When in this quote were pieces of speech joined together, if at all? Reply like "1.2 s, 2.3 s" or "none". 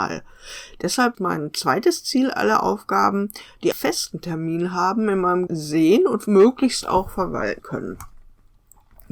1.1 s, 3.7 s, 5.5 s, 7.6 s